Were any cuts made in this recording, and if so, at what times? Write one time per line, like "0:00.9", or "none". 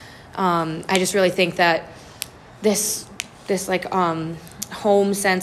0:03.3